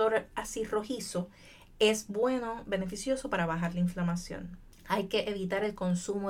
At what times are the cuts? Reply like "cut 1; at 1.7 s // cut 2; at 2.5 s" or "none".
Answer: none